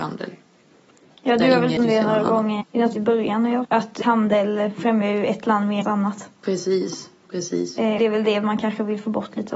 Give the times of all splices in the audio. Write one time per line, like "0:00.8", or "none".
0:01.8
0:02.6
0:02.9
0:03.6
0:04.0
0:05.8
0:08.0